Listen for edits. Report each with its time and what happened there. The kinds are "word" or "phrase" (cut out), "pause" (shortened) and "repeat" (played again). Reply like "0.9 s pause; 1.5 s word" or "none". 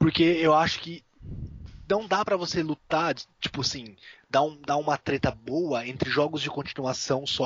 3.3 s pause